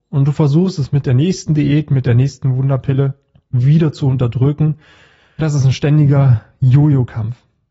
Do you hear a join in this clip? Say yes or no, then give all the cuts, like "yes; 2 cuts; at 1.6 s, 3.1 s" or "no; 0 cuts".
yes; 1 cut; at 5.4 s